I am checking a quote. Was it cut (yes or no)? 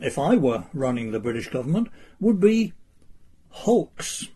no